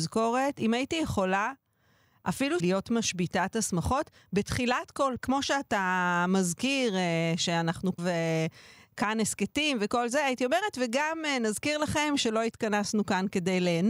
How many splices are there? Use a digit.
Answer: 3